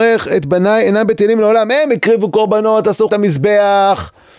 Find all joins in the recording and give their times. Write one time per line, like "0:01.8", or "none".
0:03.1